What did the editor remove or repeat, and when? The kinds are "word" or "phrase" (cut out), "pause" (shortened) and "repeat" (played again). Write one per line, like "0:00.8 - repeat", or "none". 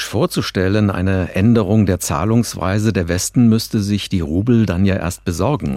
none